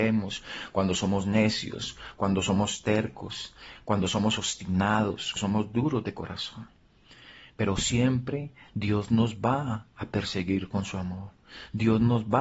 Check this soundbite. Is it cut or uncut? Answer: cut